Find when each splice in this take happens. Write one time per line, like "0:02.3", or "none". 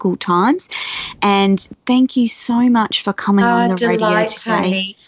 none